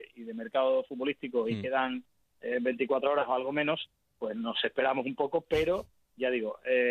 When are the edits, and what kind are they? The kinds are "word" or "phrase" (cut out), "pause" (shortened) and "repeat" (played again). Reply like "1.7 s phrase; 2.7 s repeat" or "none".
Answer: none